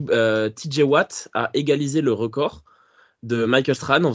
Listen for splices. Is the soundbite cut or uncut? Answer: uncut